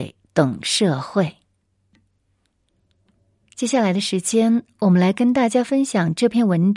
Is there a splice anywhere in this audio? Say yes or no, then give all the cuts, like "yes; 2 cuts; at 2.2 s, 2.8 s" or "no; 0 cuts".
no; 0 cuts